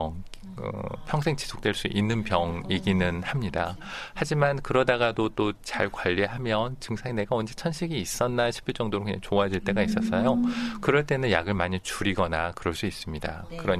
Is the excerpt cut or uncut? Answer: uncut